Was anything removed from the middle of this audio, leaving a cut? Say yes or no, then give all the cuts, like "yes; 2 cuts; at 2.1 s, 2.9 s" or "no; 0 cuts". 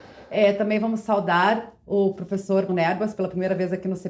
yes; 1 cut; at 2.7 s